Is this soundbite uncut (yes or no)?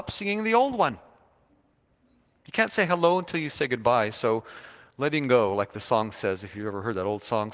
yes